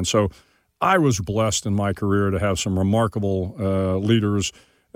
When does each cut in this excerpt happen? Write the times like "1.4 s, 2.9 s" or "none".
1.2 s